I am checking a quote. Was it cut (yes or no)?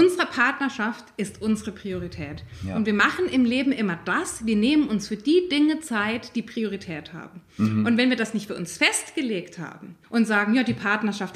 yes